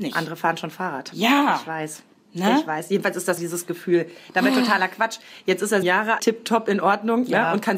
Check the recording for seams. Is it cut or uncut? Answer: cut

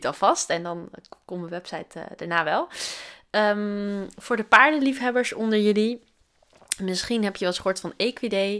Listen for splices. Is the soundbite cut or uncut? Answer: uncut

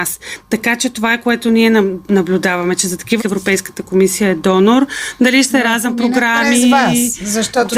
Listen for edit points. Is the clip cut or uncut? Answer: cut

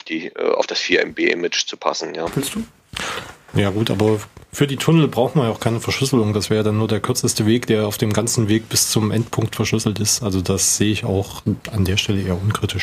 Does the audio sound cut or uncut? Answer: uncut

